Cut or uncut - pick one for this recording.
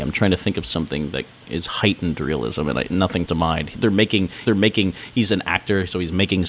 cut